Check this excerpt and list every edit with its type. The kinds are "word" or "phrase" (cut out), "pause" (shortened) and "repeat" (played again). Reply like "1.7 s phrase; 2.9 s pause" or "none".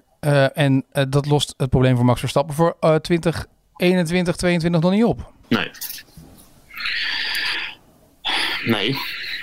5.4 s pause